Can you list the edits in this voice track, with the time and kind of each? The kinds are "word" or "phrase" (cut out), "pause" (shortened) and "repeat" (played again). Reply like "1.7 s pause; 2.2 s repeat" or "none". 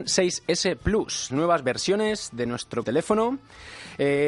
1.3 s word; 2.8 s word